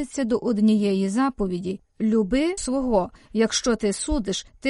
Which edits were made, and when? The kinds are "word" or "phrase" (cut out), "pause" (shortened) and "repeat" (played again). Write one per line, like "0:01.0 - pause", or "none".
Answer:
0:02.6 - word